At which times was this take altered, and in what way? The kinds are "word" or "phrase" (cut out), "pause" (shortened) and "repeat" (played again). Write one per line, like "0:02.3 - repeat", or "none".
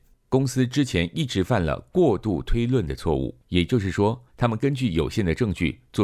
0:03.4 - pause
0:04.3 - pause